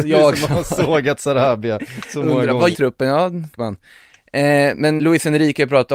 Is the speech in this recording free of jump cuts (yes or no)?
no